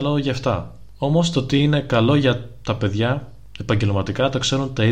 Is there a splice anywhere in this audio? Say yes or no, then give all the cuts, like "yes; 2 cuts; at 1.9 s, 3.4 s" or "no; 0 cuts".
no; 0 cuts